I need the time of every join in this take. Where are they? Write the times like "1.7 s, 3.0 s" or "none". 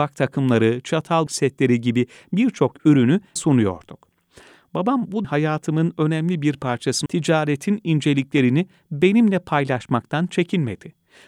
1.3 s, 3.4 s, 5.2 s, 7.1 s